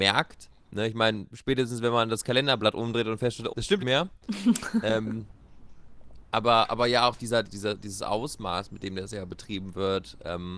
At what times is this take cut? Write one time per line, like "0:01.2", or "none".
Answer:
0:03.5
0:03.8
0:07.4